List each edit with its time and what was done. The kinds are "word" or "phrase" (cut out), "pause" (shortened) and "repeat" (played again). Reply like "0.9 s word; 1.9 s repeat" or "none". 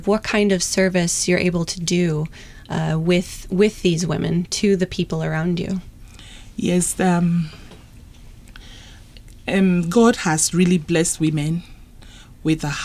none